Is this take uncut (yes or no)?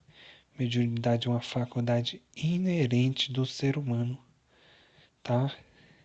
yes